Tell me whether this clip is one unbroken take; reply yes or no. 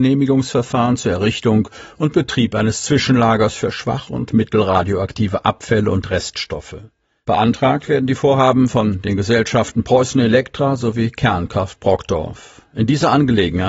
yes